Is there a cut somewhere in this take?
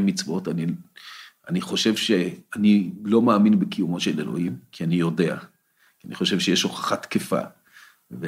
no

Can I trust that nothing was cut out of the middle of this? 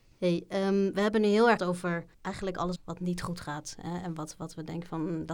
no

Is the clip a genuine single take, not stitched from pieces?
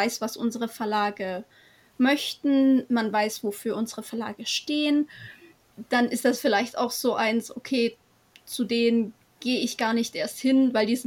yes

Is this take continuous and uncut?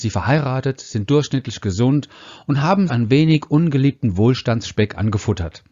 no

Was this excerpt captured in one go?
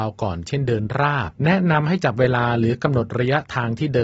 no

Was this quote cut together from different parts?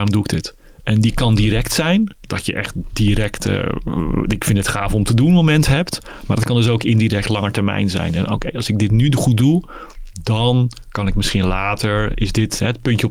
no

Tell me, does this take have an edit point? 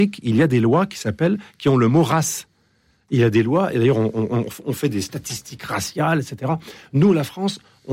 no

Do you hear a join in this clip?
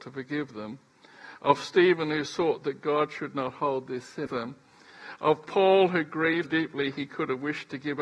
yes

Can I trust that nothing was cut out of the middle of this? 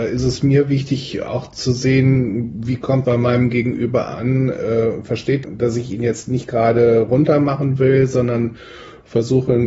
no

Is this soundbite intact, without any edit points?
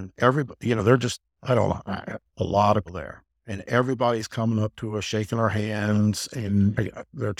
no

